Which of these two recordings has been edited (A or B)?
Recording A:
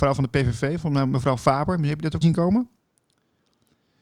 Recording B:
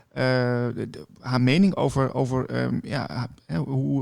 A